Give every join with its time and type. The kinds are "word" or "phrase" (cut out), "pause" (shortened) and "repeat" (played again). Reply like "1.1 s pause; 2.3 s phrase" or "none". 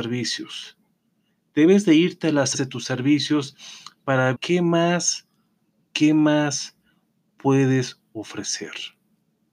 2.5 s word; 4.3 s word